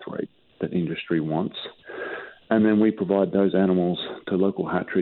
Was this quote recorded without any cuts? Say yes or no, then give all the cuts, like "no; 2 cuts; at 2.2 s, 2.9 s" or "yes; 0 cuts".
yes; 0 cuts